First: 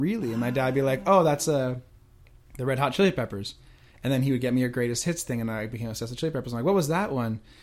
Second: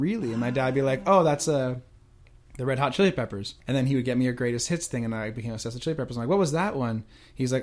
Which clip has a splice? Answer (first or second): second